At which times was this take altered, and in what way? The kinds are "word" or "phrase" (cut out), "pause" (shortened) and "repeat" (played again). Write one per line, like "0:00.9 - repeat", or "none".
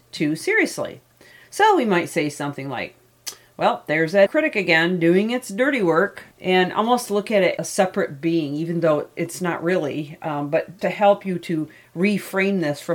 0:04.3 - word
0:06.3 - pause
0:07.6 - phrase
0:10.8 - word